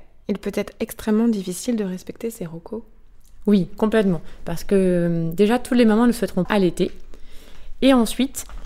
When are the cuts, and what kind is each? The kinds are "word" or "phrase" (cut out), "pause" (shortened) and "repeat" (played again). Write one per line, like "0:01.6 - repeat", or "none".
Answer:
0:06.4 - word